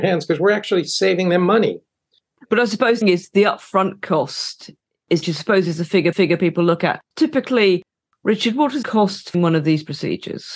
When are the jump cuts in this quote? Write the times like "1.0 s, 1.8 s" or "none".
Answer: 3.0 s, 5.2 s, 6.1 s, 7.0 s, 8.8 s, 9.3 s